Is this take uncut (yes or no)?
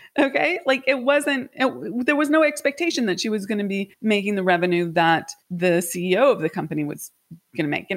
no